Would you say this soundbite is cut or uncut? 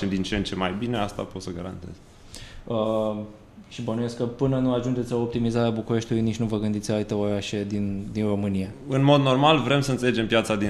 uncut